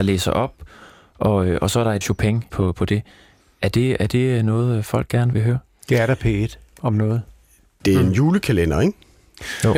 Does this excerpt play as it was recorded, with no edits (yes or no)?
no